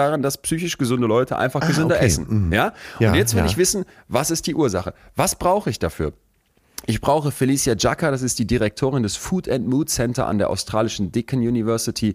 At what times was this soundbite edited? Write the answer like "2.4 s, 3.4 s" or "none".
none